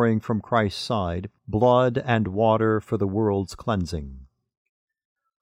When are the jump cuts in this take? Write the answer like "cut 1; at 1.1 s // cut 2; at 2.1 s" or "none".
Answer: cut 1; at 1.4 s